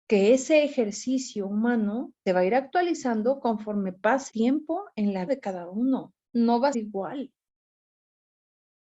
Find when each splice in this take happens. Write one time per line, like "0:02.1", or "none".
0:02.3
0:04.3
0:05.3
0:06.7